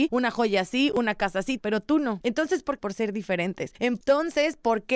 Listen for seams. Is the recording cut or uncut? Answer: cut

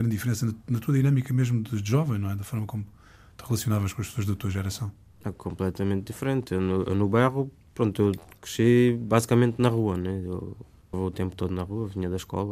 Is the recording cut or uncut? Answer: cut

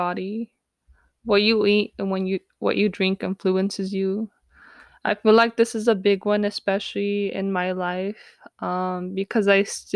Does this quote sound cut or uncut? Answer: uncut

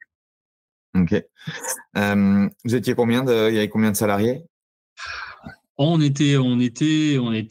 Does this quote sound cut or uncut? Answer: uncut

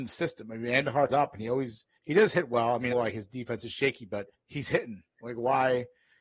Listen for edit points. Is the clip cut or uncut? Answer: cut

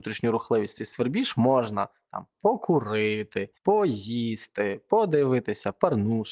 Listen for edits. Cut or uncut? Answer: cut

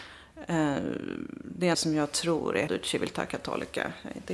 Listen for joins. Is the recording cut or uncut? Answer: cut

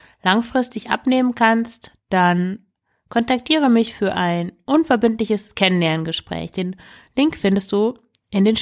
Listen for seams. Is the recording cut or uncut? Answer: uncut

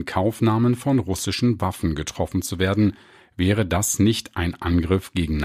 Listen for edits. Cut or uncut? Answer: uncut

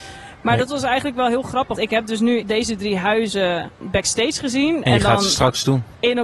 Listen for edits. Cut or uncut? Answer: cut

